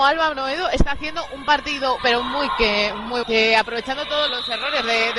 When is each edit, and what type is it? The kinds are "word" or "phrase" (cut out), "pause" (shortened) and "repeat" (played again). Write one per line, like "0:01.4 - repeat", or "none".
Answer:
0:02.0 - word
0:03.2 - word
0:04.3 - word